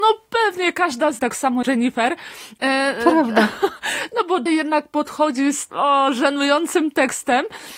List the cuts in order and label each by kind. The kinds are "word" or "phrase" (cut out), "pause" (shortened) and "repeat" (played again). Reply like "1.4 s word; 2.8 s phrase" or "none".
1.2 s phrase; 1.6 s word; 4.5 s word; 5.7 s word